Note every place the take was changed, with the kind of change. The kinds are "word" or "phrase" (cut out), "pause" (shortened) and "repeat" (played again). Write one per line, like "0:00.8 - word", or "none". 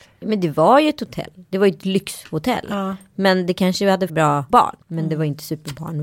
0:04.1 - word
0:04.5 - word
0:04.8 - pause